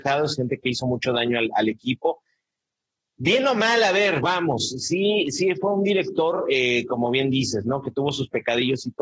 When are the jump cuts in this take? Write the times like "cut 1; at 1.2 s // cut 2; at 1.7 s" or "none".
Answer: none